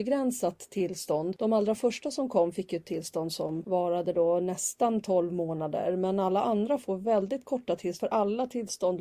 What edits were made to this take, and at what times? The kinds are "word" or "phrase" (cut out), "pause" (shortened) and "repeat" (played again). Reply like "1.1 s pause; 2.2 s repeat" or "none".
none